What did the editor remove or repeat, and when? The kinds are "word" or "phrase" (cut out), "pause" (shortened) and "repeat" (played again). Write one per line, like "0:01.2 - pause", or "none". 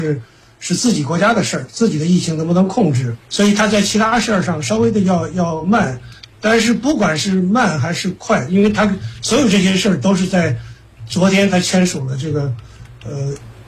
0:03.2 - pause